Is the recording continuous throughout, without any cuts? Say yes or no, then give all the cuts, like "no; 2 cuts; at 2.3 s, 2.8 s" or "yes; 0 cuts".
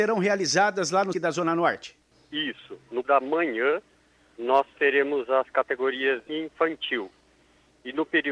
no; 3 cuts; at 1.1 s, 3.0 s, 6.3 s